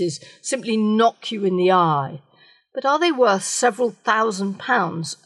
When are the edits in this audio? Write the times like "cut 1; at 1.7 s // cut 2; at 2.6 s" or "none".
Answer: none